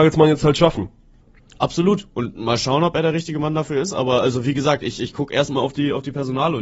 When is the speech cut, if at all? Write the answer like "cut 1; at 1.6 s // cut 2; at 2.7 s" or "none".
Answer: none